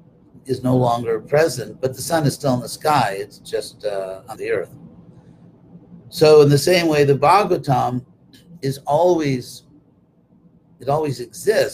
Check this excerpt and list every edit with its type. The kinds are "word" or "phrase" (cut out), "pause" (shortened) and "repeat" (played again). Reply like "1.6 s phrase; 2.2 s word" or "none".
4.4 s phrase